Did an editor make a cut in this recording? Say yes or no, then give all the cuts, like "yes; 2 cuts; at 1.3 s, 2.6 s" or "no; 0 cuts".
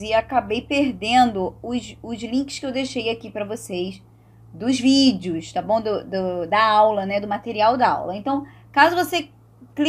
no; 0 cuts